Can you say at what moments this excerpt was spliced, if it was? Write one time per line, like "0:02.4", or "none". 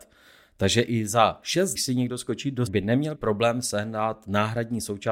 0:01.8
0:02.7
0:03.2